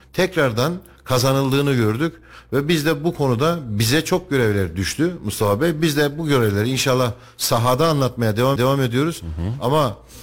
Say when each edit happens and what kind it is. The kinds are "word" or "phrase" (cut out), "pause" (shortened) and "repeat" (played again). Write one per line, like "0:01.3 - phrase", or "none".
0:08.6 - repeat